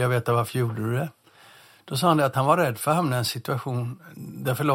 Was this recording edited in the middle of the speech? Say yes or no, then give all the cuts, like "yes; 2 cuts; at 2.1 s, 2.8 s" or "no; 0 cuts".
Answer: no; 0 cuts